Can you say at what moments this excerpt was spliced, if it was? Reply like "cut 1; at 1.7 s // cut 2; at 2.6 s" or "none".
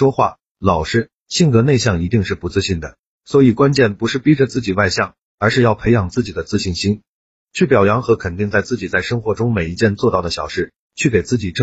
none